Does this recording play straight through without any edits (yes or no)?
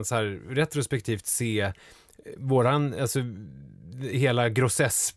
yes